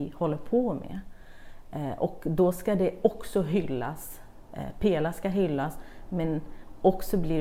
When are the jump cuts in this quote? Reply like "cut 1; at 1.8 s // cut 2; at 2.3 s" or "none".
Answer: none